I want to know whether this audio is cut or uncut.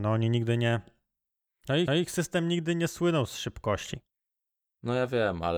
cut